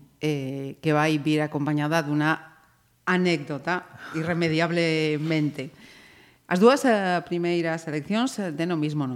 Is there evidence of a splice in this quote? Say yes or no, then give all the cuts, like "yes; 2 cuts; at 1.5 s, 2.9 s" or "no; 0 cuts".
no; 0 cuts